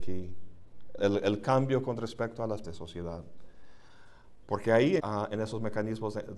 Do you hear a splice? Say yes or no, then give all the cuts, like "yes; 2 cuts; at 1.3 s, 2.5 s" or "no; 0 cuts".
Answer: yes; 4 cuts; at 1.0 s, 2.6 s, 4.4 s, 5.0 s